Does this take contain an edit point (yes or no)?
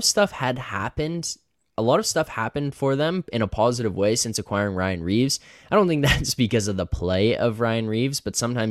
no